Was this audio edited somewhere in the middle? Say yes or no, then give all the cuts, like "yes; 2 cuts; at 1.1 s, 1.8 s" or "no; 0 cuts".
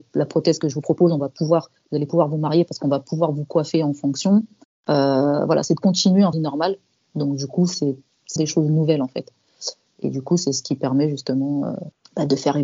yes; 2 cuts; at 6.3 s, 8.4 s